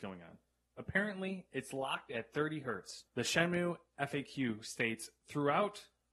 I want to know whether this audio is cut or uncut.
cut